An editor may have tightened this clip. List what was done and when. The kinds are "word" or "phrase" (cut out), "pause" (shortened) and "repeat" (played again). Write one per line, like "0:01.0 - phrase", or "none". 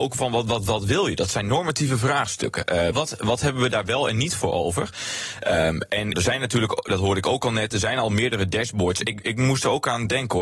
0:02.9 - word
0:06.1 - phrase